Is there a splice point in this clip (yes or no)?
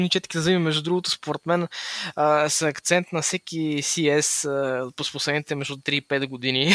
no